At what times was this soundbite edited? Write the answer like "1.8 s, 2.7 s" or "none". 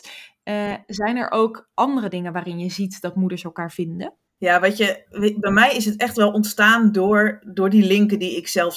none